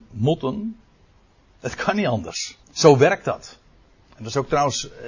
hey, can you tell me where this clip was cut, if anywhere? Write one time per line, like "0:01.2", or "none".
0:02.6